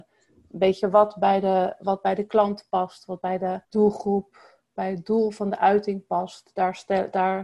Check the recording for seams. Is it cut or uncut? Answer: cut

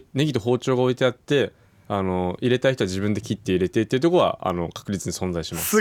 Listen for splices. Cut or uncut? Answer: uncut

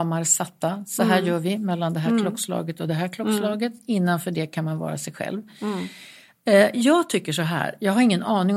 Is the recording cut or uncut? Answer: uncut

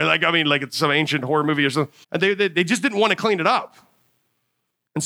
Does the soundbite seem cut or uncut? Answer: cut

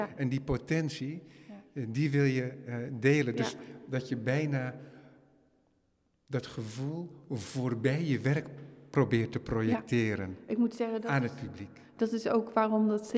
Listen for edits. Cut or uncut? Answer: uncut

